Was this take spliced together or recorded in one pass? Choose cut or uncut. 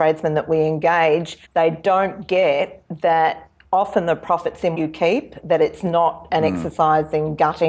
cut